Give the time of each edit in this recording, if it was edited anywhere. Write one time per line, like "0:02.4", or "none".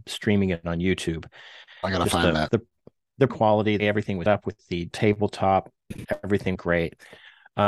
0:03.3
0:03.8
0:04.3
0:04.9
0:06.5